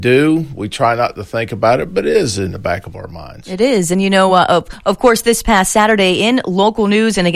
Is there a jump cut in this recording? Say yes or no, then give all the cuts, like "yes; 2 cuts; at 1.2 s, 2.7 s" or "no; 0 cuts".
no; 0 cuts